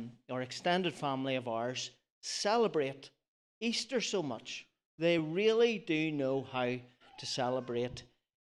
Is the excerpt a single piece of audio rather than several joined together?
yes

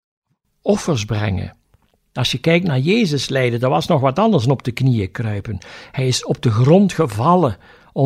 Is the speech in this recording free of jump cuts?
yes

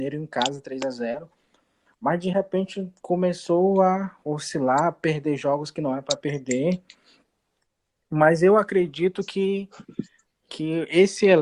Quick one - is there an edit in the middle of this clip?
no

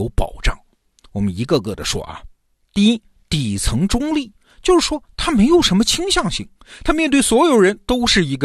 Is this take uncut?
yes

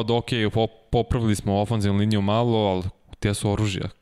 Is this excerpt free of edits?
yes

